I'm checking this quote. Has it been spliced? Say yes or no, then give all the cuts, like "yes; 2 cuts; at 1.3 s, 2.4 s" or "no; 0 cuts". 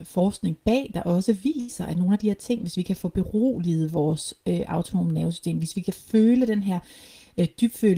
no; 0 cuts